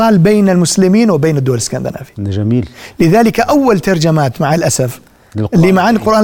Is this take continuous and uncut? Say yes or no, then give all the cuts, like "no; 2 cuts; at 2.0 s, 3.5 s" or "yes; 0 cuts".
yes; 0 cuts